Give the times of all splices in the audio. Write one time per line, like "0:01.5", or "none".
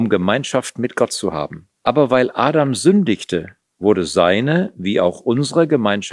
0:01.8

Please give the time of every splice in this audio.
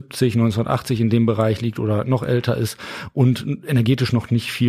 none

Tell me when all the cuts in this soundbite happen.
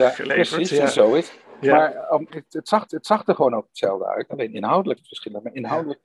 0:02.3
0:02.9
0:05.0

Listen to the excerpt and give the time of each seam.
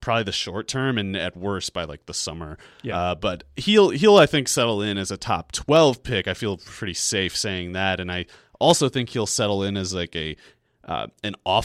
none

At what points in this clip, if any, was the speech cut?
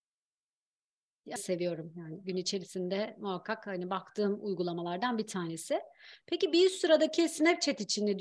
0:01.4

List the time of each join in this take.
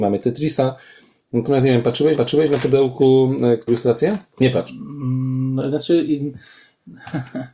0:02.2
0:03.7

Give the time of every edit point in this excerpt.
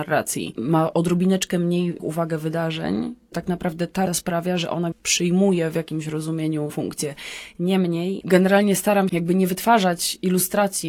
0:02.0
0:03.3
0:04.1
0:04.9
0:06.7
0:09.1

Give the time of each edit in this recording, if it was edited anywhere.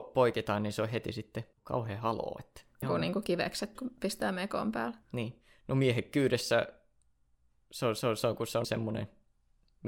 0:01.5
0:02.8
0:03.8
0:05.0
0:08.0
0:08.6

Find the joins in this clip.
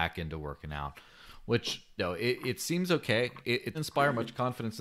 0:02.0
0:03.7

